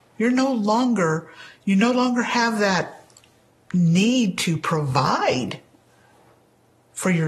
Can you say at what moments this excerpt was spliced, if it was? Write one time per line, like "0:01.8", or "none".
none